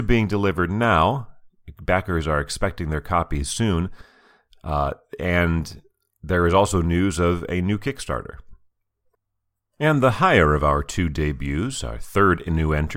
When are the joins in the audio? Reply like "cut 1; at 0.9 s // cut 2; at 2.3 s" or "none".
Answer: none